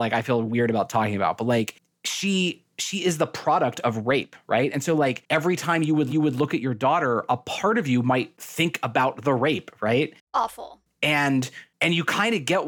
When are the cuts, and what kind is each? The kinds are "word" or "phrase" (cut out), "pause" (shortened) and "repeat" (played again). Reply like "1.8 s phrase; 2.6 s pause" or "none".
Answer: 6.1 s repeat